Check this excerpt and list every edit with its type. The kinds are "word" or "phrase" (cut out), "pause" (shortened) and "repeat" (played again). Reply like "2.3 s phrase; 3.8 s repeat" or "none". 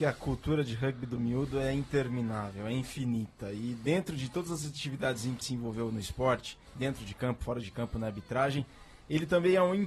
5.4 s word; 6.7 s pause